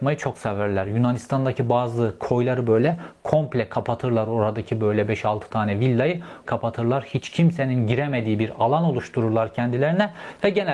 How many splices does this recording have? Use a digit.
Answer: 1